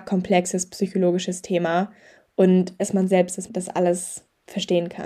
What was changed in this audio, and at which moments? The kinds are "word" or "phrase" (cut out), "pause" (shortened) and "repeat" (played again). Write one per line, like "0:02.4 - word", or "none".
0:02.8 - word
0:03.5 - word